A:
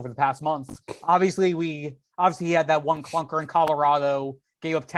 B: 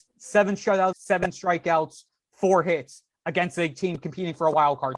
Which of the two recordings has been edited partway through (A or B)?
B